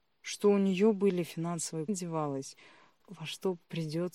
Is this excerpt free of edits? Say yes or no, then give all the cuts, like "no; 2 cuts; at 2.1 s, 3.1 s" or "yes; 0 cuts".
no; 2 cuts; at 1.9 s, 3.0 s